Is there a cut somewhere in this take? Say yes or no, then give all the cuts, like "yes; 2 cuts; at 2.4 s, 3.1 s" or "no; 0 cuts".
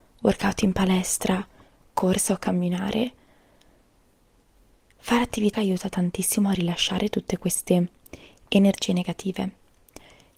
yes; 1 cut; at 5.5 s